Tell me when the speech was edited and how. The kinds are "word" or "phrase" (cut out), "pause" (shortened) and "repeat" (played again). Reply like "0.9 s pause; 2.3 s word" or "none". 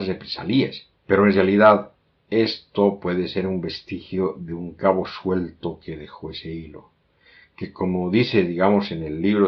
1.0 s pause